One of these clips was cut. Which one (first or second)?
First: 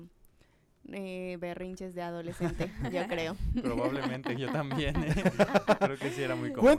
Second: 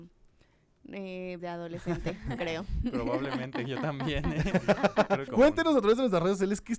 second